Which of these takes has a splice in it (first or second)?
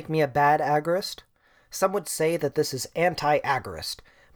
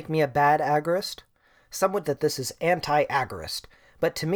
second